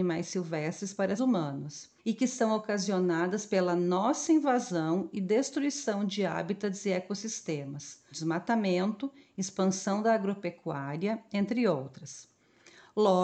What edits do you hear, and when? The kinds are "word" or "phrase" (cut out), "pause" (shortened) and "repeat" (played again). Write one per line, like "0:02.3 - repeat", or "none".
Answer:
0:01.2 - word
0:02.0 - pause
0:08.1 - phrase